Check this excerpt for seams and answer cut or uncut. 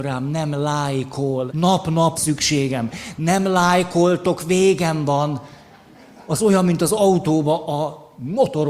cut